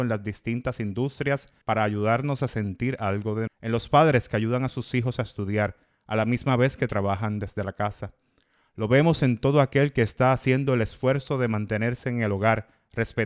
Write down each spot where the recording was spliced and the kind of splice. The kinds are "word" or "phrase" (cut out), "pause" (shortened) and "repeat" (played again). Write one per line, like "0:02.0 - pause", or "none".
0:01.6 - pause
0:03.5 - word

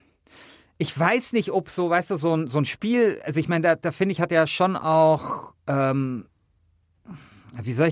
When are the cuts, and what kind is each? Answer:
none

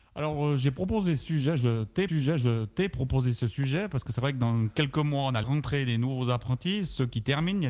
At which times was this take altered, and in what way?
0:02.1 - repeat
0:05.4 - phrase

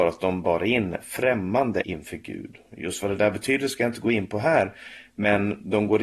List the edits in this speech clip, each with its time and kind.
0:01.8 - word

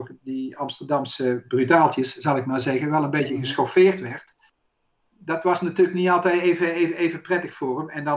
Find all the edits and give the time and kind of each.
none

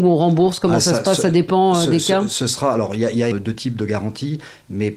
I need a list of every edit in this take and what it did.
0:03.3 - word

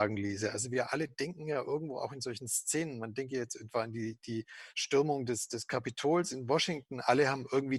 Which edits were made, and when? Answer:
none

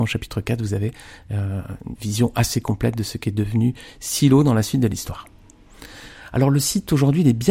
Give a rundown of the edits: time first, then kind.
0:02.0 - word

